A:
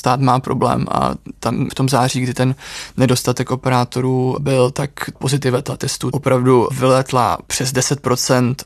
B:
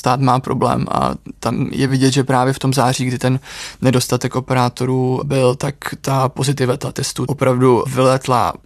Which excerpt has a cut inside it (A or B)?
A